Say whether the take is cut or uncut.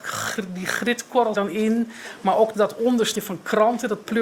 cut